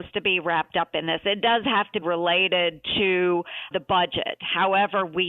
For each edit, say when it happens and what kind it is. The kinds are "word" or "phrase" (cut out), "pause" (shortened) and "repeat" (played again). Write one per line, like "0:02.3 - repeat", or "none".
0:02.0 - word
0:03.7 - word